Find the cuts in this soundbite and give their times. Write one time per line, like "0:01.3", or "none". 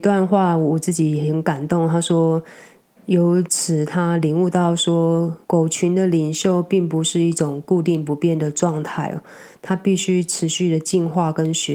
0:05.4